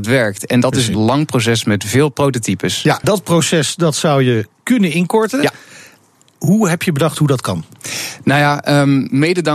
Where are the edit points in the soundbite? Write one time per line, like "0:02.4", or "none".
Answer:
0:00.9
0:03.0